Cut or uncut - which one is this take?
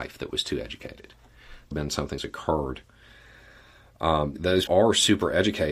cut